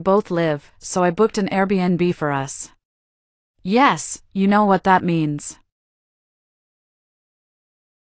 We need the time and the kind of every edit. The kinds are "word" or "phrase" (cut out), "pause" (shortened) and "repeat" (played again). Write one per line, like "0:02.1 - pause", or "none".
none